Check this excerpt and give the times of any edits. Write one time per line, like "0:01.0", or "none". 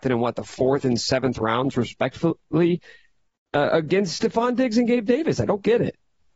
none